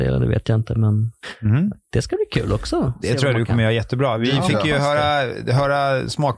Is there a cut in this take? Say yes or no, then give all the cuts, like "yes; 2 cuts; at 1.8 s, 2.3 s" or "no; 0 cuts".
no; 0 cuts